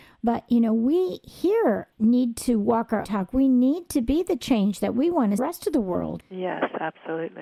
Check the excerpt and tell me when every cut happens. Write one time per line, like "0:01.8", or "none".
0:01.9
0:03.0
0:05.4
0:06.2